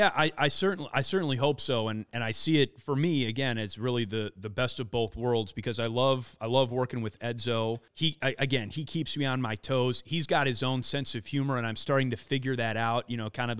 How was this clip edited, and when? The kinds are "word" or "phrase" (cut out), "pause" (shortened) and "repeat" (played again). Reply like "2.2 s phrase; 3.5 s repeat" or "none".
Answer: 7.9 s pause